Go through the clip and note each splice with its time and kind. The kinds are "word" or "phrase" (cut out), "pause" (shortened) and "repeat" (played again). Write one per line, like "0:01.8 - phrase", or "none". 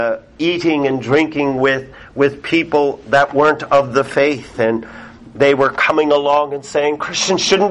none